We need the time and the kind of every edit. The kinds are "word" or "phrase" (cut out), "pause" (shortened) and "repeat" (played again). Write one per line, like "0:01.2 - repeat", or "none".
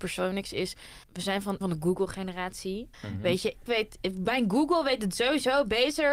0:01.0 - pause
0:01.6 - phrase
0:02.9 - pause
0:03.7 - word